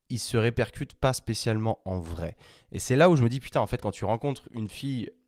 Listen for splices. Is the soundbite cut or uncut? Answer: uncut